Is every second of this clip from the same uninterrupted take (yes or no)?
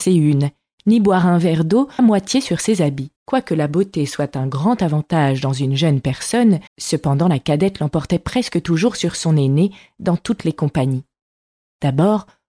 no